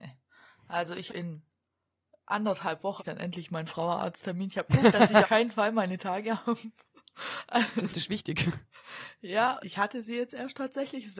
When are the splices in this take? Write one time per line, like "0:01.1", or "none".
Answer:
0:01.1
0:03.0
0:04.7
0:05.2
0:07.9
0:09.6